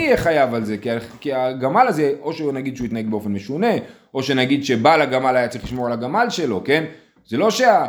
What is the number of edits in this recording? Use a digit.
0